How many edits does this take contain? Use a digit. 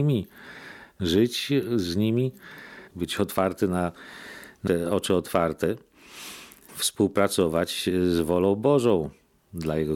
3